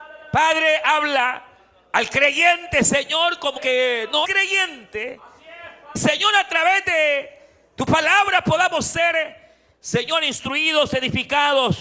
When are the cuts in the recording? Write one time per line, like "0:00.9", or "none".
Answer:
0:03.6
0:04.2
0:06.0

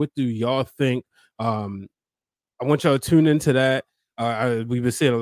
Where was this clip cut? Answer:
none

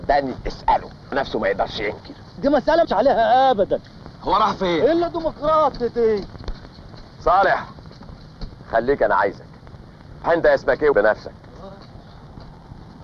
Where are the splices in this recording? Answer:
0:01.1
0:02.4
0:02.8
0:10.2
0:10.9

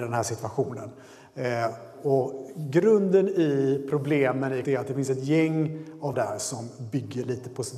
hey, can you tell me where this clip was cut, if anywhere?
0:04.6
0:06.1

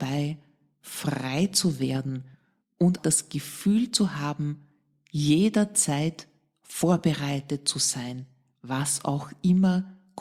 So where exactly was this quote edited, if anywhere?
0:03.0

